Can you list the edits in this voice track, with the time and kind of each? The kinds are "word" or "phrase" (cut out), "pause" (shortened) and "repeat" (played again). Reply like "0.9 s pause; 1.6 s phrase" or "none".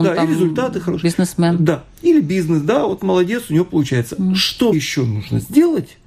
4.7 s word